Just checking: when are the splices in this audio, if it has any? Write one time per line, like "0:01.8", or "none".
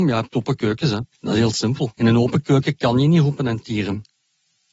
0:01.1
0:01.9